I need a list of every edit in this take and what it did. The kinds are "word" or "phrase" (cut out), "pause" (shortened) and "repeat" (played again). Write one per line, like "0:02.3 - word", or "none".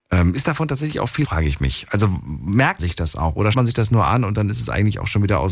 0:01.2 - phrase
0:02.8 - word
0:03.5 - word